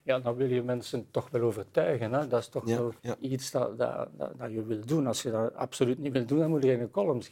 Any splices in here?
yes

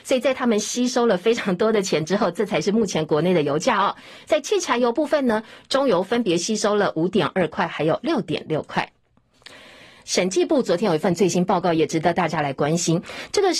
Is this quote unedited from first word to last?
yes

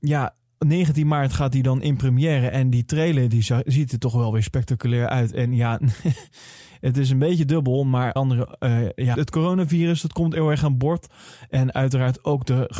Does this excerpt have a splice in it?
yes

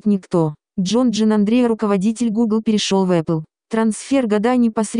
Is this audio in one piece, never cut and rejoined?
yes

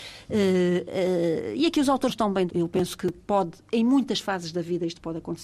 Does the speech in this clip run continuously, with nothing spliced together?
no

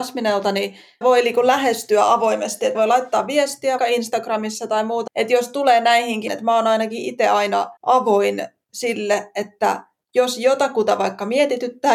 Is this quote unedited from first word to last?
no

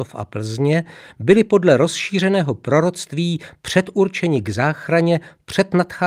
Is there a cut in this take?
no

